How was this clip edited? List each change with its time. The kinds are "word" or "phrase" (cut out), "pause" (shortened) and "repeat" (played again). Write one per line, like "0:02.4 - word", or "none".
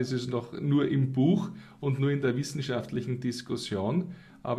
none